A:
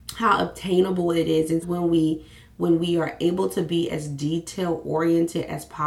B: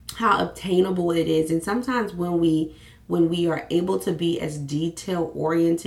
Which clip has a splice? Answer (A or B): A